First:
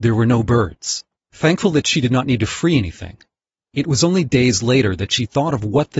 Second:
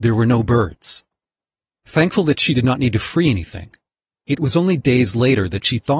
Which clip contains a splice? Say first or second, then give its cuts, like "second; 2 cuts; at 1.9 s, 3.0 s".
first; 1 cut; at 1.2 s